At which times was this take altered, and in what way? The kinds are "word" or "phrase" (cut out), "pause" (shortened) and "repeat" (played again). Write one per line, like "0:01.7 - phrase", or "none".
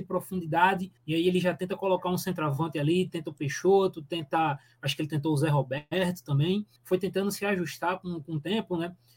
0:01.0 - pause
0:06.8 - pause